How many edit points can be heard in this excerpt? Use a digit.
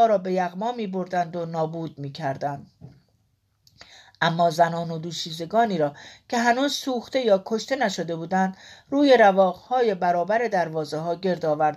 0